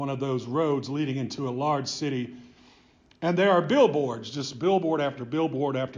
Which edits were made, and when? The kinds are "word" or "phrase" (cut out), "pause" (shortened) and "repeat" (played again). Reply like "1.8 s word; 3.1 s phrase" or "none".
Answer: none